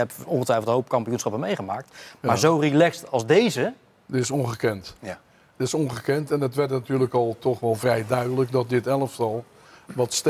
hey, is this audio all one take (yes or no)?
yes